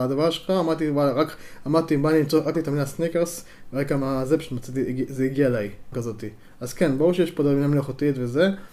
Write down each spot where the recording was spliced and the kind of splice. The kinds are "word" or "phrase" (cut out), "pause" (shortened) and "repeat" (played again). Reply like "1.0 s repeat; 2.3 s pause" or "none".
2.5 s word; 5.9 s word